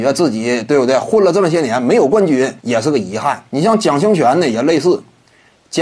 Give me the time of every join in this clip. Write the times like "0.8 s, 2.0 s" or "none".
2.6 s, 3.5 s